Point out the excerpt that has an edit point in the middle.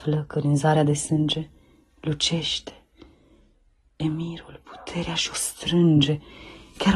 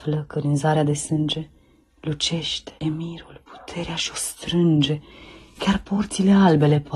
second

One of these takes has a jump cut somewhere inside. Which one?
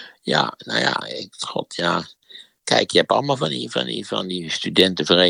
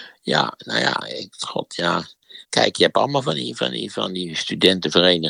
second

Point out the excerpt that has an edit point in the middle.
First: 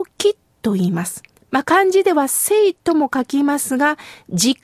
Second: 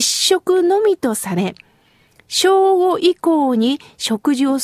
first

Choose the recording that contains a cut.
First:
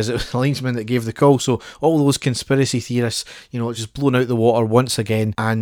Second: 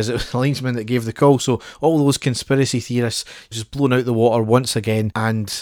second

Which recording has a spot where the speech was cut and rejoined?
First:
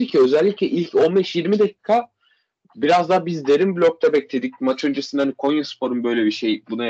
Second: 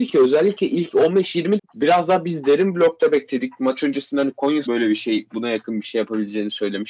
second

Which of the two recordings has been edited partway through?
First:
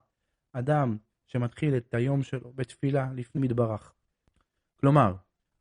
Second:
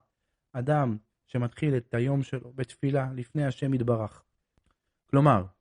first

